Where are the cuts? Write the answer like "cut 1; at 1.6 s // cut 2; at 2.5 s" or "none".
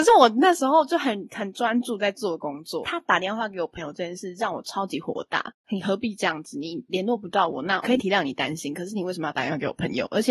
cut 1; at 7.8 s